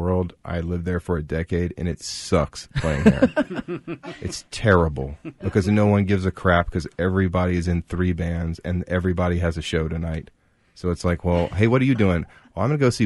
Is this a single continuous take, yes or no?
yes